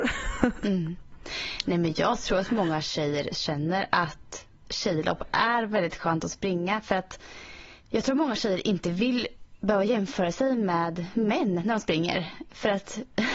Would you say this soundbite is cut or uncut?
uncut